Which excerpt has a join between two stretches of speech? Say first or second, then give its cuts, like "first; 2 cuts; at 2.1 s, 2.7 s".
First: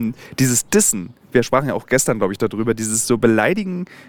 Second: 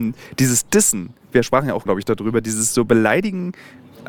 second; 1 cut; at 1.9 s